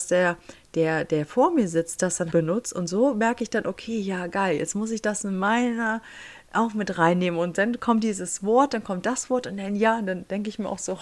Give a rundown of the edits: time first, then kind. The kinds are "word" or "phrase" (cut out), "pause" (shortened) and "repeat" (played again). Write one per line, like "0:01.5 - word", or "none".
0:02.3 - word